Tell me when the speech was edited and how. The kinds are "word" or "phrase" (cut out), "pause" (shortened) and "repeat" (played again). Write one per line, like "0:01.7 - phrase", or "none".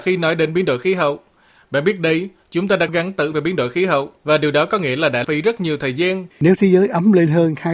0:02.9 - word
0:03.3 - word
0:04.2 - pause
0:05.2 - word
0:06.3 - pause